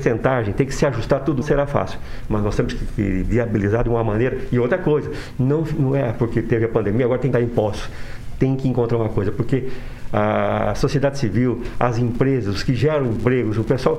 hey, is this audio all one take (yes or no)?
no